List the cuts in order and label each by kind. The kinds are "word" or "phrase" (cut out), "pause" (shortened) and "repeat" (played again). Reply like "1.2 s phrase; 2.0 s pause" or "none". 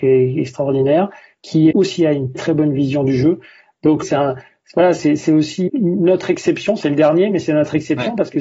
1.7 s word; 2.4 s word; 4.0 s word; 5.7 s word